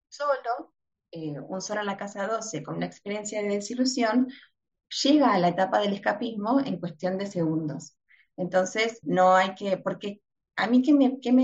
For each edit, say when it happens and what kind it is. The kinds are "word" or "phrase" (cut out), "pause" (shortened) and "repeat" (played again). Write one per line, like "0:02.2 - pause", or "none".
0:09.0 - word